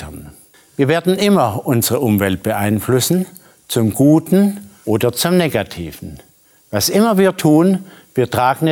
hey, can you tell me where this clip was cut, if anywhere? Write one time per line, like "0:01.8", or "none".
none